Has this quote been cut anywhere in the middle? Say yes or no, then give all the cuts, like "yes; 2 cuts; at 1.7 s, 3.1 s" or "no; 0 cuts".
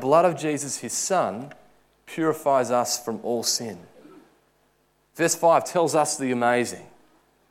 no; 0 cuts